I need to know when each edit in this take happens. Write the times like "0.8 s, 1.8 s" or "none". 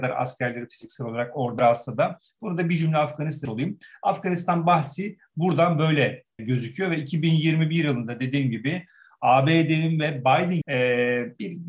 1.6 s, 3.4 s, 6.4 s, 10.6 s